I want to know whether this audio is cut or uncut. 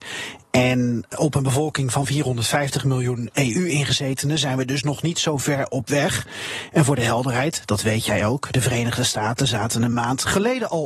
uncut